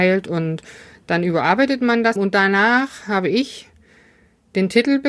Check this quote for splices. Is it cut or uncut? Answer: cut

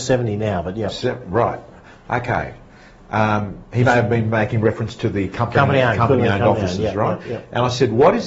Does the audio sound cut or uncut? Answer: uncut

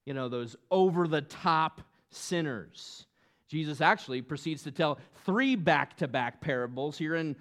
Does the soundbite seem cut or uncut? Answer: uncut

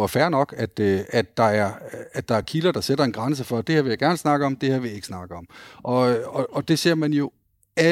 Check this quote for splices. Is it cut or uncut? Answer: uncut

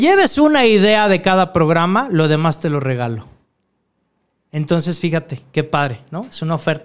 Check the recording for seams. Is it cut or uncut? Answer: uncut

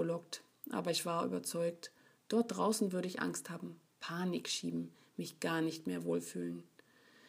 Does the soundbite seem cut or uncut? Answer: uncut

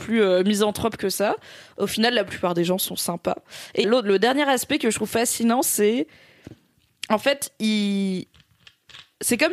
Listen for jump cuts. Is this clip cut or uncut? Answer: cut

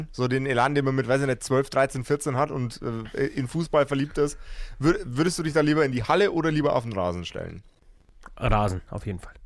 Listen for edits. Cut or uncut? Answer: uncut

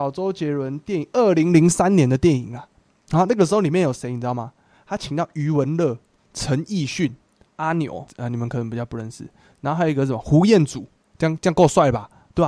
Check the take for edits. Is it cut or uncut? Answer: uncut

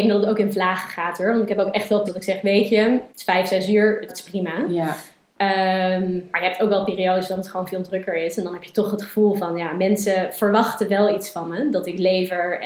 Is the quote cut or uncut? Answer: cut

